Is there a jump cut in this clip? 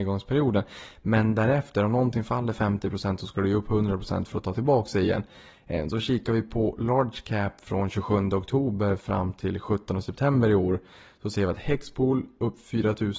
no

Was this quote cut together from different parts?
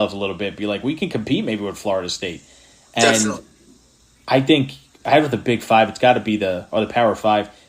no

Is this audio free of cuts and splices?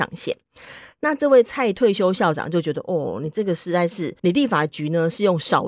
no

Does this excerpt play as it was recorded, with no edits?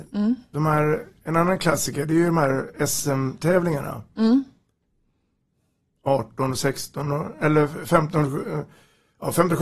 yes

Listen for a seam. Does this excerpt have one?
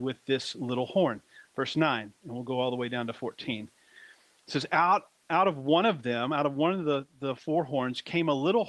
no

